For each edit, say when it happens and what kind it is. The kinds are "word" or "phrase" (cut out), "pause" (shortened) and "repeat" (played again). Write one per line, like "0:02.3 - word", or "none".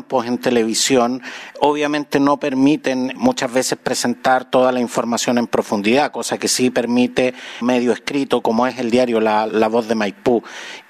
0:03.2 - word
0:07.6 - word
0:08.4 - word
0:09.5 - word